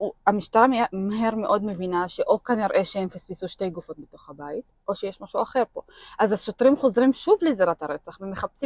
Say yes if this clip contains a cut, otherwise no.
no